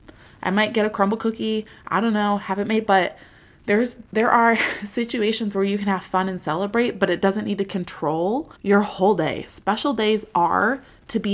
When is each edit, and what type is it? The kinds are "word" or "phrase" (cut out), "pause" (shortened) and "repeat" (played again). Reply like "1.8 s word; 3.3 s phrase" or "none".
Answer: 2.9 s phrase; 4.1 s pause; 8.6 s pause